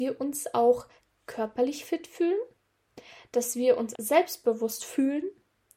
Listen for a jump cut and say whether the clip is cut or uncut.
cut